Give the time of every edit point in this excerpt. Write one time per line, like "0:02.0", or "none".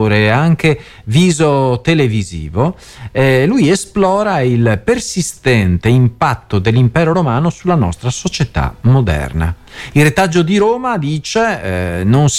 none